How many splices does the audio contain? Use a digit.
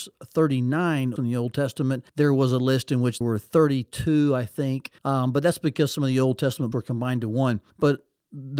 6